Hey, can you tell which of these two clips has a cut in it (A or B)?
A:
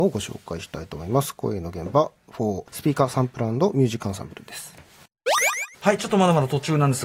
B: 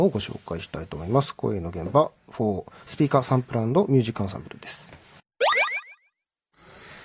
A